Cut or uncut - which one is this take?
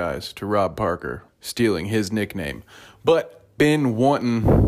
cut